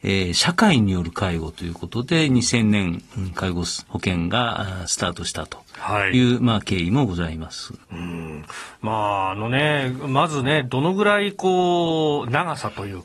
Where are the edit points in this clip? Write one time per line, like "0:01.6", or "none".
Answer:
0:03.8